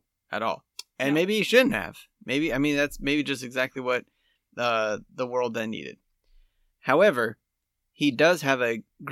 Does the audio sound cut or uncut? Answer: uncut